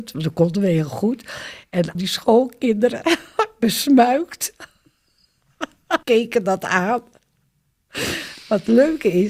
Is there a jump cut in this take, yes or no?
yes